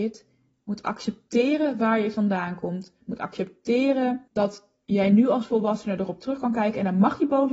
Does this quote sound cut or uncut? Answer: cut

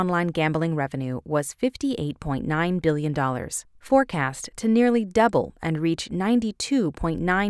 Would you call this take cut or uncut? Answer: uncut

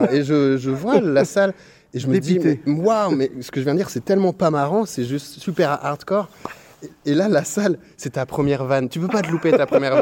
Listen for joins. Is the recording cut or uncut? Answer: uncut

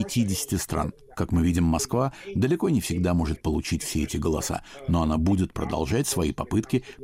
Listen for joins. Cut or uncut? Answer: uncut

